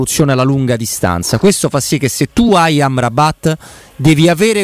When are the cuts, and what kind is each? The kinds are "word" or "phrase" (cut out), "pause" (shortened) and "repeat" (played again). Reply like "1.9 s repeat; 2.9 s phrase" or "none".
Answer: none